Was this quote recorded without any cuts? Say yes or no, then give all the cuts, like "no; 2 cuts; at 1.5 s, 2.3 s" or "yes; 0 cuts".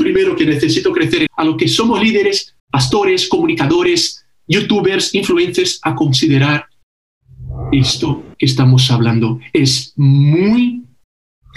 no; 3 cuts; at 1.3 s, 2.6 s, 8.3 s